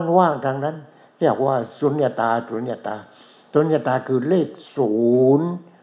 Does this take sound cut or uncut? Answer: uncut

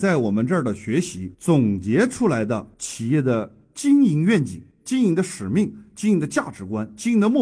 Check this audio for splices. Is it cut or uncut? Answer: cut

